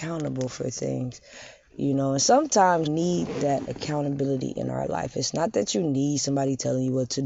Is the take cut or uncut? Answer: cut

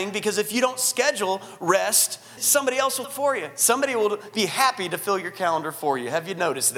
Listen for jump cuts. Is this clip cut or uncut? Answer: cut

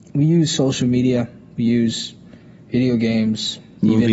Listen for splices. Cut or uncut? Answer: uncut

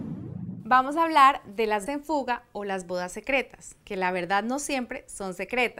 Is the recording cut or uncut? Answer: cut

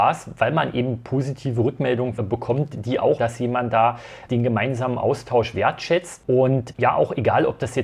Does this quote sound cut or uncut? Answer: cut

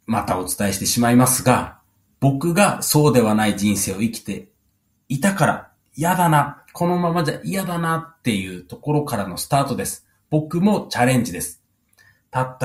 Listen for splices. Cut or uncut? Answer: uncut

